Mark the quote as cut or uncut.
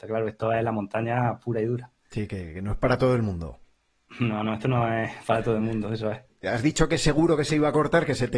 uncut